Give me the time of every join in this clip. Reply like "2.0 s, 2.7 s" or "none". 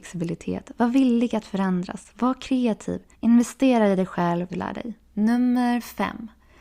3.1 s, 4.5 s, 5.0 s

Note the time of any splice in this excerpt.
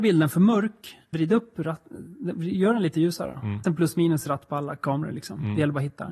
1.1 s, 3.6 s

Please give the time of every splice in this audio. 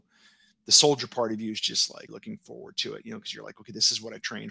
2.1 s

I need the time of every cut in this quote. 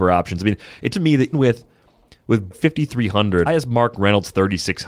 0.9 s, 1.3 s, 2.5 s, 3.5 s

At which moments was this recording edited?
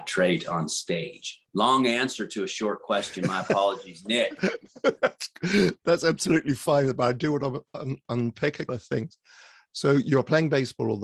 1.4 s, 5.8 s, 8.7 s

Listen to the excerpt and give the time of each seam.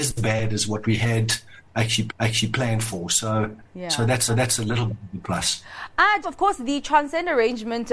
2.1 s, 4.3 s, 6.2 s

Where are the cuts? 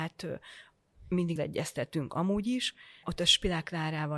1.4 s, 3.0 s

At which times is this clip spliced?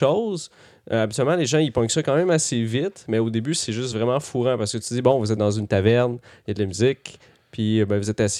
none

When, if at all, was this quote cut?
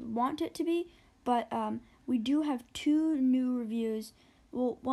none

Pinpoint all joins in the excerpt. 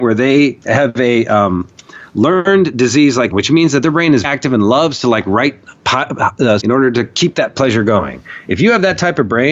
3.3 s, 4.2 s, 6.6 s

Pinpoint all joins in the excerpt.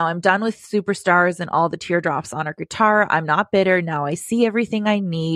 none

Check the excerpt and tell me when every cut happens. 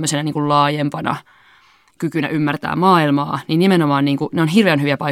none

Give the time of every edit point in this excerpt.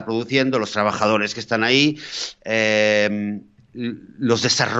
none

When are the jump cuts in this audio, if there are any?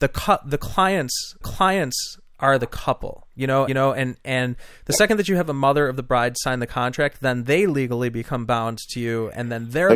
1.4 s, 3.7 s

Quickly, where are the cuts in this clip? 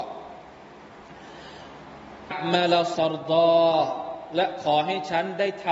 2.3 s, 2.9 s

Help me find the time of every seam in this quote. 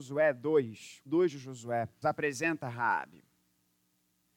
1.1 s, 2.0 s

